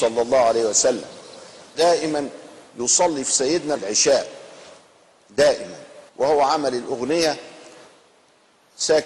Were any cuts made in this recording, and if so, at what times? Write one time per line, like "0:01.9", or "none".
0:01.7
0:03.8
0:06.1